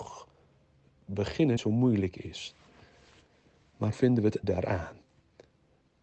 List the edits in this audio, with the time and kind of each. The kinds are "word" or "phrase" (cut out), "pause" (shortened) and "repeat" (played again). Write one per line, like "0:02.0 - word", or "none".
0:01.6 - word
0:03.9 - word
0:04.4 - word